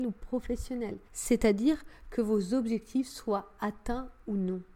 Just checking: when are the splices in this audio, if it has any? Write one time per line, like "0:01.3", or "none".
0:01.1